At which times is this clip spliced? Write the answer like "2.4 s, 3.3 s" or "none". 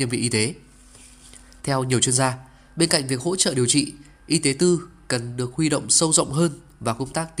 none